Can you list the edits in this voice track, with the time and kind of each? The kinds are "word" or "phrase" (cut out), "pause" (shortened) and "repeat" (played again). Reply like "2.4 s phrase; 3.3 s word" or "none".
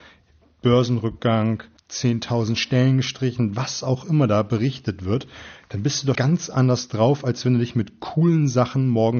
1.8 s pause; 6.1 s word